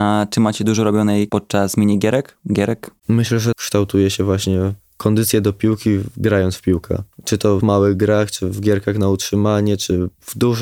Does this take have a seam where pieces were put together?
yes; 6 cuts; at 1.3 s, 3.0 s, 3.5 s, 4.8 s, 7.1 s, 7.6 s

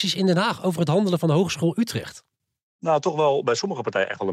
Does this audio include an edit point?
no; 0 cuts

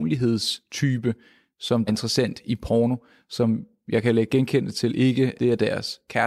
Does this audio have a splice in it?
yes; 2 cuts; at 1.9 s, 5.3 s

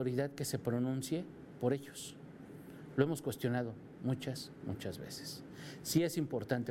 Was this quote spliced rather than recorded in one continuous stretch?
yes; 1 cut; at 4.6 s

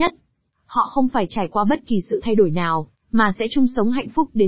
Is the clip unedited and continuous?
yes; 0 cuts

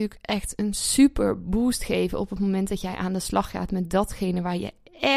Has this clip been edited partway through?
no; 0 cuts

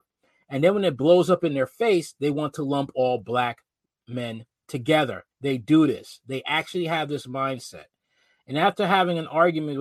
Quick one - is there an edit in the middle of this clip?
yes; 1 cut; at 5.3 s

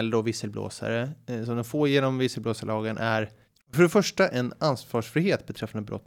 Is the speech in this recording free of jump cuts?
yes; 0 cuts

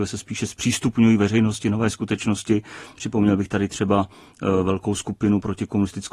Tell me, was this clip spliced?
no; 0 cuts

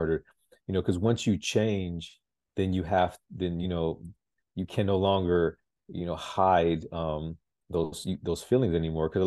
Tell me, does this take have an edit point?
no; 0 cuts

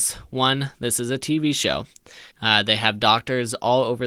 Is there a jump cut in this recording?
yes; 1 cut; at 2.3 s

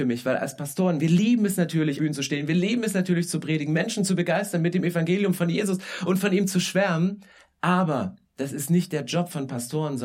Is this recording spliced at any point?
yes; 1 cut; at 2.0 s

